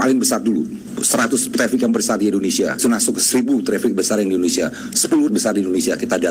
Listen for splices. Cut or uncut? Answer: cut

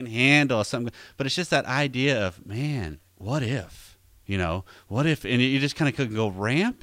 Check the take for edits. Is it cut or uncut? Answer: cut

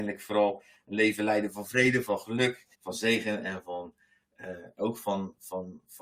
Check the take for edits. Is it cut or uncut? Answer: cut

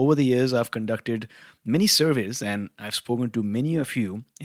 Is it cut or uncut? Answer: uncut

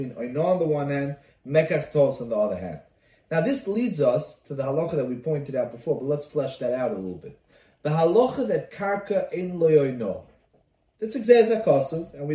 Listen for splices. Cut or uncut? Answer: uncut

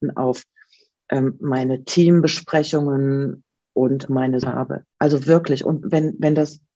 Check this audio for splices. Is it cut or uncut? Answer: cut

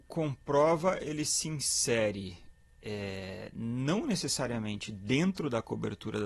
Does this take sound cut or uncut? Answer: uncut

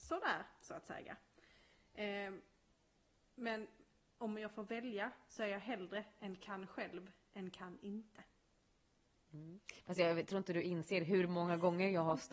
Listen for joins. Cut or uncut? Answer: uncut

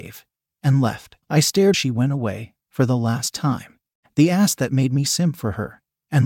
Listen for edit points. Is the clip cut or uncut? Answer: cut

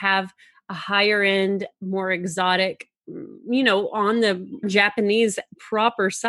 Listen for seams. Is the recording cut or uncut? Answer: cut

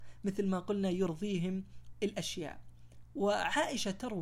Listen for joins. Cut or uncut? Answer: cut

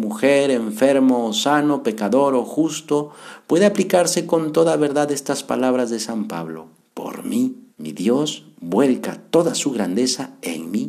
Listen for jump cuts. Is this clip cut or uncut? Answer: cut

